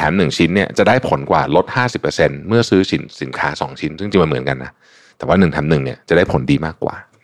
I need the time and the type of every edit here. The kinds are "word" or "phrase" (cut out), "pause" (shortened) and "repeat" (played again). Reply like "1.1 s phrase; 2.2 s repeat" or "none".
none